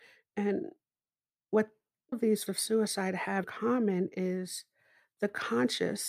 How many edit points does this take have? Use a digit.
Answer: 3